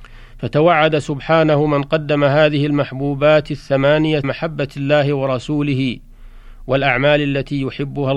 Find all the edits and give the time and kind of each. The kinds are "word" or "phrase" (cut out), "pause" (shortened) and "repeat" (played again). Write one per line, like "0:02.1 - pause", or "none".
0:04.2 - word